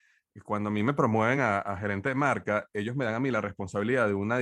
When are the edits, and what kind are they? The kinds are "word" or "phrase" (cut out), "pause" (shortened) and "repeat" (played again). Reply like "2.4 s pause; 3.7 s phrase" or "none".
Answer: none